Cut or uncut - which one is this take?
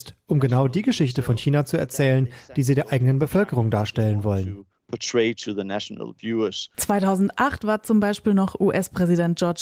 uncut